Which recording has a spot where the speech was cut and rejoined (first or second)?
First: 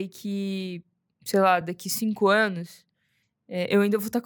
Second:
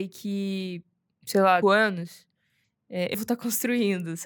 second